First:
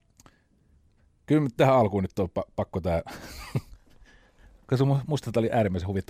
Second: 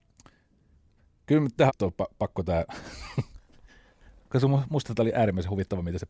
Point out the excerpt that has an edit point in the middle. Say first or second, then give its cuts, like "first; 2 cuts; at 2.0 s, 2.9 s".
second; 1 cut; at 1.7 s